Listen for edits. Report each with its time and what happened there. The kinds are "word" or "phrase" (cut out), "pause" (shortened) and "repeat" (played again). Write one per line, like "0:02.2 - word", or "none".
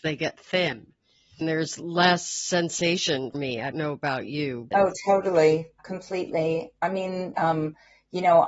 0:01.4 - word
0:03.3 - word
0:03.7 - word
0:04.7 - word
0:05.8 - word
0:07.3 - word

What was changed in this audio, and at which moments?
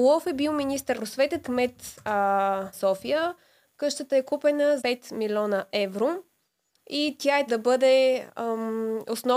0:00.9 - word
0:01.4 - word
0:02.7 - word
0:04.8 - word
0:07.5 - word

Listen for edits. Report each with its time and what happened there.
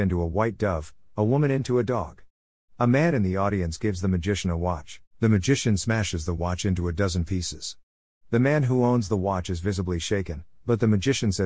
0:05.1 - pause

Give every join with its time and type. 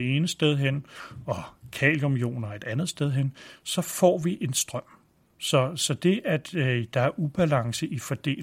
none

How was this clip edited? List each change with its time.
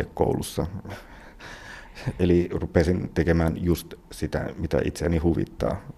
none

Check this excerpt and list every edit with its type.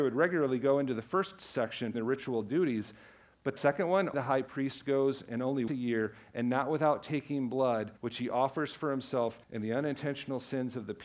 0:01.9 - word
0:03.6 - word
0:04.1 - word
0:05.7 - word
0:08.0 - pause
0:09.4 - pause

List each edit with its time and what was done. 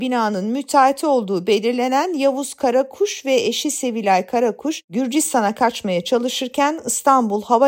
none

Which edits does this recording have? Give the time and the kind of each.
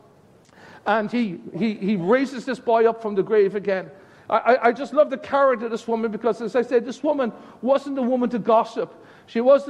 none

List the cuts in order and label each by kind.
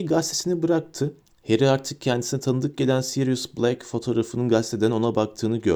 0:01.2 - pause

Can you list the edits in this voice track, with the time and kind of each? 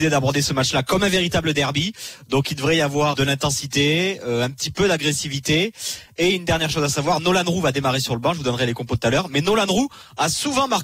0:03.1 - word

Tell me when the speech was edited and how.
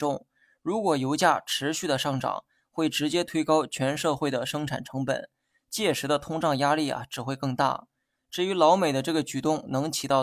none

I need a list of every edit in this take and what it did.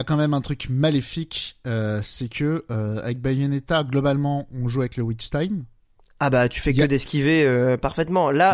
none

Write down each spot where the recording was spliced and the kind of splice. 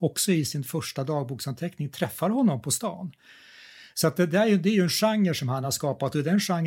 none

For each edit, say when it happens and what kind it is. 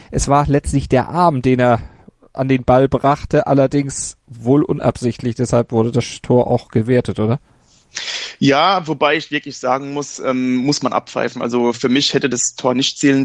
none

